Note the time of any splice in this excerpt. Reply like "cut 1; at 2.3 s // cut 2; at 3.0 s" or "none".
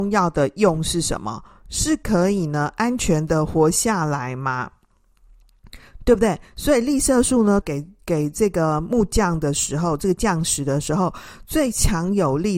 cut 1; at 7.6 s